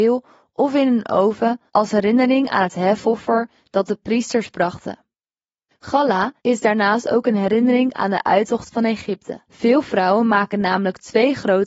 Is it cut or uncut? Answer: cut